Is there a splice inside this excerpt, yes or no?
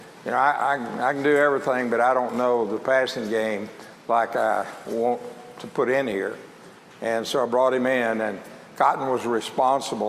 no